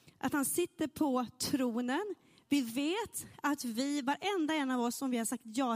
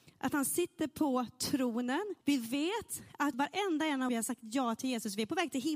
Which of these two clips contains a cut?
second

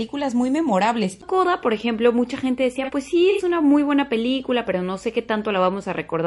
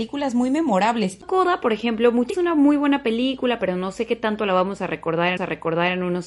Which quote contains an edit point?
second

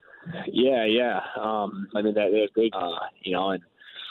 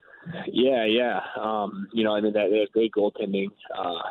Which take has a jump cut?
first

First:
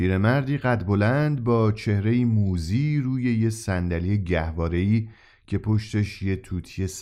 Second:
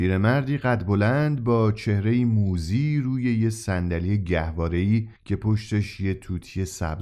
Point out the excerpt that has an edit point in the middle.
second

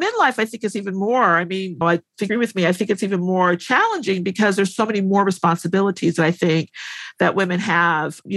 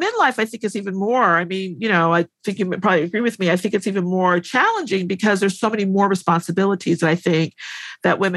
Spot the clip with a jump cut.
first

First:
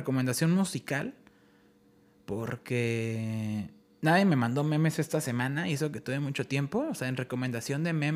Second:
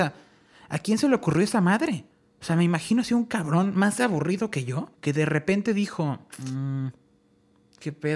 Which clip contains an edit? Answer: second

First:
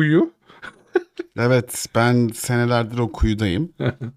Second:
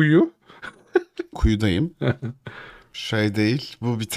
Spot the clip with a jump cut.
second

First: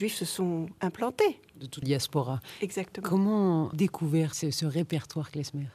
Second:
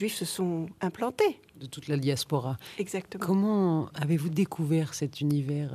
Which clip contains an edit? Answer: first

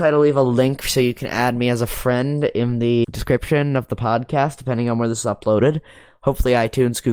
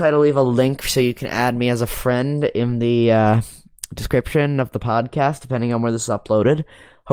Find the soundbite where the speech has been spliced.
first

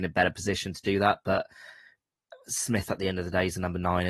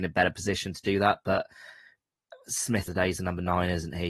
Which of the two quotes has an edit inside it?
second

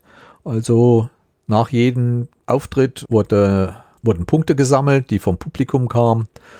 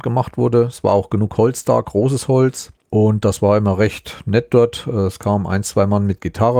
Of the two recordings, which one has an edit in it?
second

